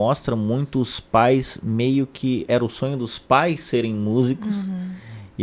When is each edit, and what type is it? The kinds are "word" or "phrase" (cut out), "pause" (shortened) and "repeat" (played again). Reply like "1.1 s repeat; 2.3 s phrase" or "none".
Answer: none